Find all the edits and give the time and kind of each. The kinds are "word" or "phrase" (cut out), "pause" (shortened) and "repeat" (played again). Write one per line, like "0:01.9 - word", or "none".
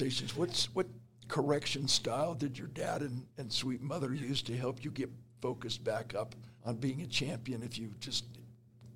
0:06.6 - pause